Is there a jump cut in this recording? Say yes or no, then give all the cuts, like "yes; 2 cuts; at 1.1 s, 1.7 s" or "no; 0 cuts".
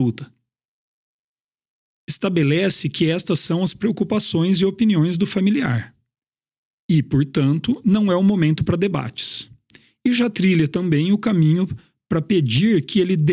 no; 0 cuts